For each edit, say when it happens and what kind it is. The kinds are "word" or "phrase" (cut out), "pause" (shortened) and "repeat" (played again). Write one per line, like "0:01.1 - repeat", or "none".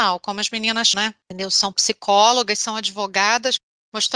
0:00.9 - word